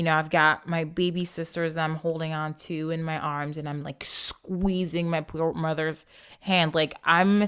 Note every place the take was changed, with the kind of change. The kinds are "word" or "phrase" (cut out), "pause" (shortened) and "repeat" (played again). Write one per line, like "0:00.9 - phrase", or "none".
none

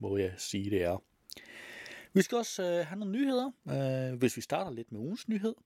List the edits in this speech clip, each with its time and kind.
0:03.6 - pause

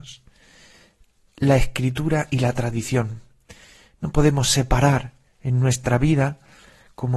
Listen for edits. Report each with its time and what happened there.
none

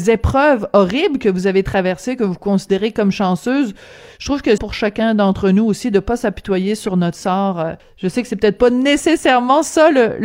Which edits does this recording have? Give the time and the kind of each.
0:04.6 - phrase
0:07.8 - pause

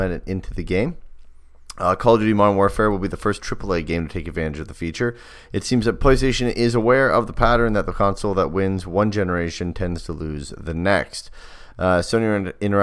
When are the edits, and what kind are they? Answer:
none

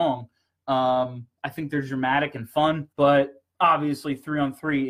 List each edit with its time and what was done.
0:02.9 - pause

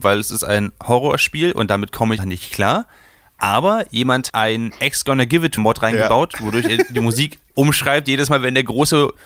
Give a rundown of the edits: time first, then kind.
0:02.2 - word
0:04.3 - word
0:05.6 - word
0:07.5 - pause

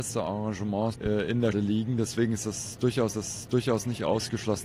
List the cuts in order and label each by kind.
0:00.9 - word
0:01.5 - word
0:03.1 - repeat

